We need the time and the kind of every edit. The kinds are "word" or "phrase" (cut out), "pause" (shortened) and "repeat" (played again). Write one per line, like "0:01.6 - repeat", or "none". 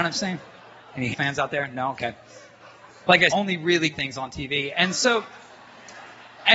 0:01.1 - word
0:03.3 - word
0:03.9 - word